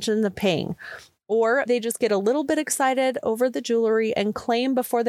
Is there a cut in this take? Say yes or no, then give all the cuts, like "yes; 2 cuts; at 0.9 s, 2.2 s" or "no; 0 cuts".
yes; 1 cut; at 1.7 s